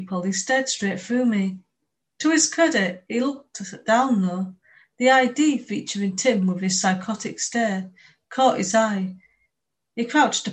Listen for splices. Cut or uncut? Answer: uncut